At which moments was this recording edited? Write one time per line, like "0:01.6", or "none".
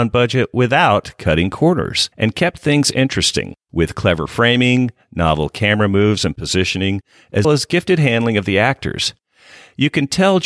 0:02.1
0:03.6
0:07.4